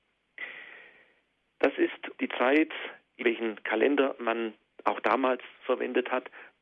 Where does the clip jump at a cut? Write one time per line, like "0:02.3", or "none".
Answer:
0:02.2
0:03.2